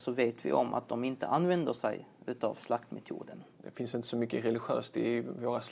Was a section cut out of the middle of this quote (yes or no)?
no